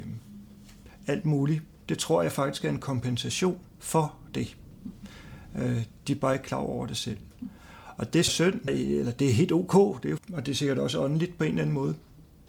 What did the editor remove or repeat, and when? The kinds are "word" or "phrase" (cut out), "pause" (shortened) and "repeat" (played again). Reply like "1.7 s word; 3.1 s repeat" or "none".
3.7 s pause; 8.3 s phrase; 8.7 s word; 10.2 s word